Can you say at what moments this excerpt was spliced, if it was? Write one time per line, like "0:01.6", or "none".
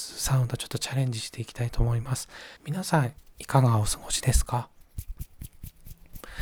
0:02.6